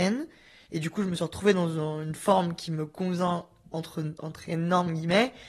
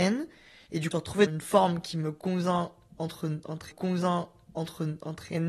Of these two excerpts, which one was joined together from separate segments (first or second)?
second